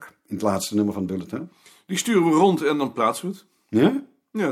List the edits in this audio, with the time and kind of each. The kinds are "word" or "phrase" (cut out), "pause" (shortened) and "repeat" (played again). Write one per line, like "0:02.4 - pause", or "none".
none

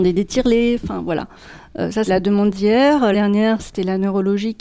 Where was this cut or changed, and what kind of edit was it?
0:02.1 - word
0:03.1 - phrase

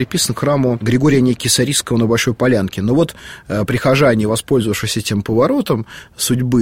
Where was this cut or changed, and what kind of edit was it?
none

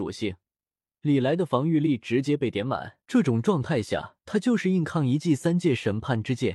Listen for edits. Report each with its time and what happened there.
0:03.0 - pause
0:04.2 - pause

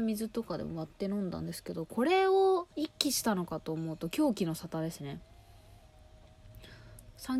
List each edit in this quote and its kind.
0:02.7 - pause

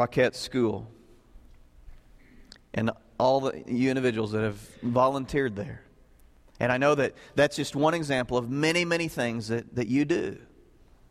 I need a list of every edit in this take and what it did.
none

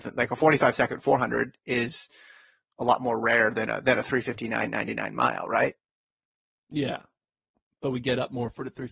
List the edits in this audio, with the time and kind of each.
none

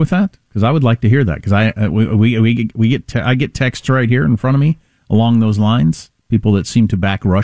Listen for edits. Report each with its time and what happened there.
0:06.2 - pause

